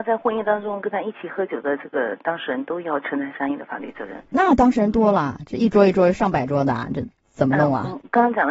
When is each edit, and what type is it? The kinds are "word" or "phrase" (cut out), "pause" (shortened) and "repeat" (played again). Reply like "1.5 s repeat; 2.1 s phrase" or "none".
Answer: 4.3 s pause